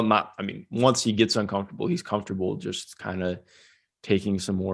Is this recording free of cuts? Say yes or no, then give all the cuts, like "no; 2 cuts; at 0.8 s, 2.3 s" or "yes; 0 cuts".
yes; 0 cuts